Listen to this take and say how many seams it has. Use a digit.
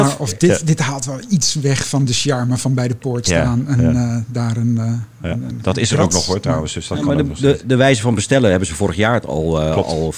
0